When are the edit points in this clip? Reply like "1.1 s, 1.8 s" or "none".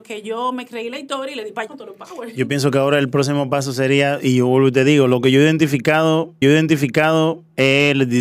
1.7 s, 6.4 s

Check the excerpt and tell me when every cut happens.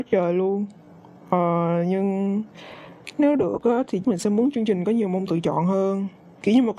4.0 s

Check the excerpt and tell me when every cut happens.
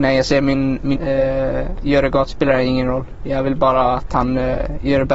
1.0 s, 2.3 s

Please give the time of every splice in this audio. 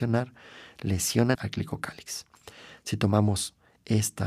1.3 s

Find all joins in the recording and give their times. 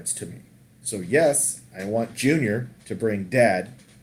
2.8 s

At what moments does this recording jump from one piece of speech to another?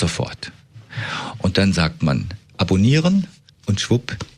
3.5 s

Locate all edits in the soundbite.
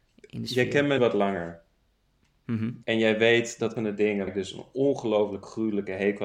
1.0 s, 2.8 s, 3.8 s, 4.3 s

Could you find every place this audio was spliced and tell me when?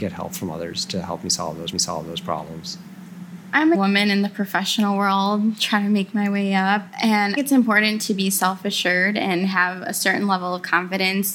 1.7 s, 3.7 s, 7.4 s

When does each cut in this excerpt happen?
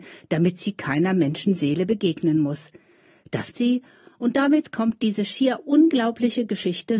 3.5 s

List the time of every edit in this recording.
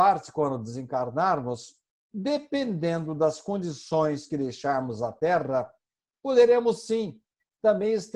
none

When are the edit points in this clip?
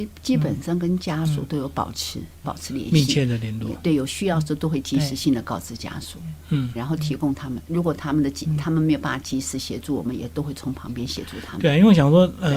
2.4 s, 6.8 s

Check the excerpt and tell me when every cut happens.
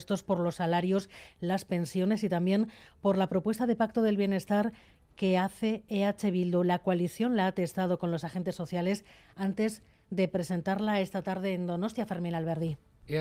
none

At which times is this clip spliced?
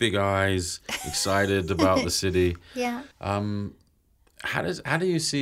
3.1 s

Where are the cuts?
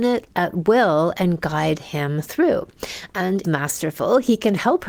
3.4 s

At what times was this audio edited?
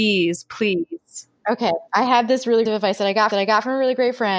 1.9 s, 2.7 s, 3.3 s

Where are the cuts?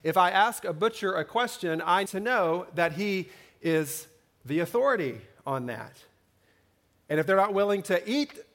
2.1 s

